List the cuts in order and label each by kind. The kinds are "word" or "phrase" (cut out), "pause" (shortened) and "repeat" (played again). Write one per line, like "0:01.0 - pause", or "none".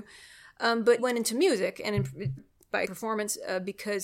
0:01.0 - word
0:02.4 - word
0:02.8 - word